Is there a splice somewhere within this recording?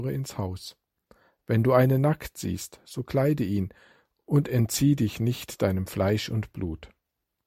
no; 0 cuts

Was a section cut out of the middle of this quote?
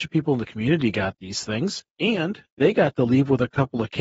no; 0 cuts

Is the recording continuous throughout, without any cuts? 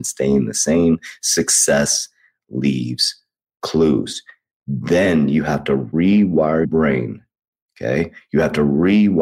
no; 1 cut; at 6.6 s

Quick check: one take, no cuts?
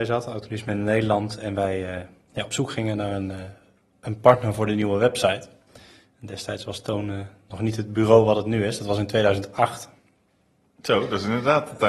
yes; 0 cuts

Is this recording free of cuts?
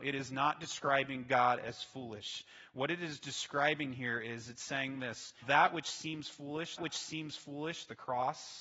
no; 2 cuts; at 5.4 s, 6.8 s

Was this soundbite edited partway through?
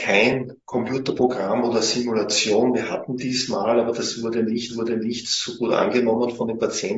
yes; 1 cut; at 4.7 s

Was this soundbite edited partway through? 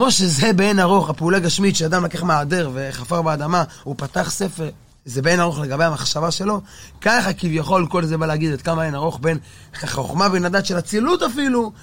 yes; 1 cut; at 3.8 s

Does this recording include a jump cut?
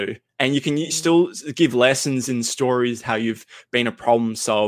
no; 0 cuts

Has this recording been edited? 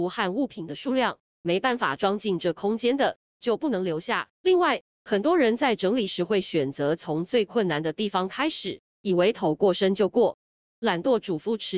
yes; 1 cut; at 4.3 s

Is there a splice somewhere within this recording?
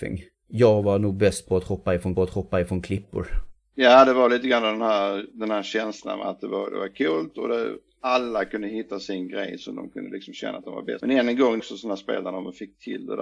yes; 2 cuts; at 2.2 s, 11.6 s

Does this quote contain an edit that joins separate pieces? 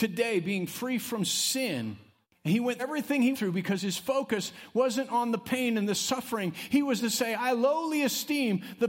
yes; 4 cuts; at 2.2 s, 2.8 s, 3.3 s, 7.0 s

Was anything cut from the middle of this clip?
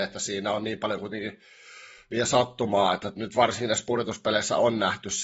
no; 0 cuts

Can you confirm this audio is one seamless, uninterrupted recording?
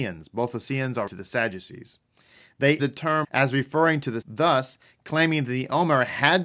no; 4 cuts; at 1.1 s, 2.8 s, 3.2 s, 4.2 s

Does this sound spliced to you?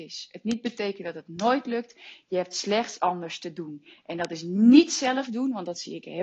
yes; 1 cut; at 3.0 s

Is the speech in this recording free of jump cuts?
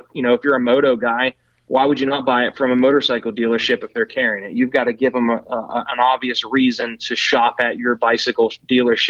yes; 0 cuts

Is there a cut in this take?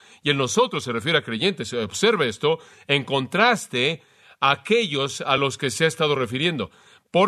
no; 0 cuts

